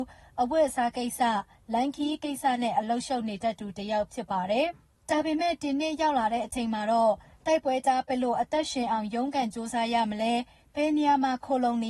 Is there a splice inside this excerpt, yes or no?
no